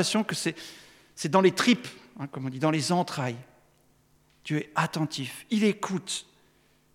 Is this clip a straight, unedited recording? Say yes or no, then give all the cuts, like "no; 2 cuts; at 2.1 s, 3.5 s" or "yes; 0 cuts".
yes; 0 cuts